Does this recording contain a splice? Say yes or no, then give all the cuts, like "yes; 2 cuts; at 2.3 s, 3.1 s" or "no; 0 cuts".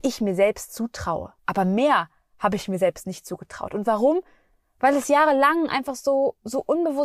yes; 1 cut; at 1.4 s